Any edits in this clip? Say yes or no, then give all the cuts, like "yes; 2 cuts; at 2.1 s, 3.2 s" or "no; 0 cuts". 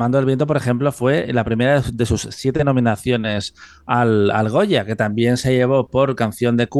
no; 0 cuts